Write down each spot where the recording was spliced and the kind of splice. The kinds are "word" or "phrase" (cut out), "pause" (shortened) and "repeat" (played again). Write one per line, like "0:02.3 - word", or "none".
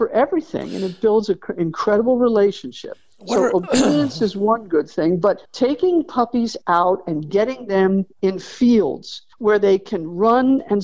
0:05.4 - pause
0:09.3 - pause